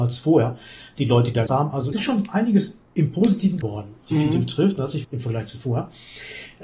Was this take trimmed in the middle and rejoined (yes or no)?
yes